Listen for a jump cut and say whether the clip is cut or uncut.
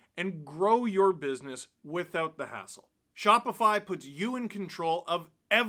uncut